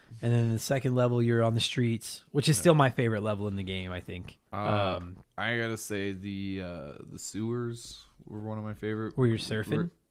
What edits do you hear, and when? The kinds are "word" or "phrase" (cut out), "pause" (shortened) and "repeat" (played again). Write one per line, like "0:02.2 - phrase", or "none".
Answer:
0:04.5 - pause
0:05.2 - pause